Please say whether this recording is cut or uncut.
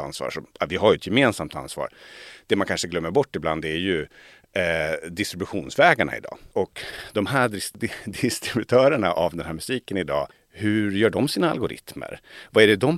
uncut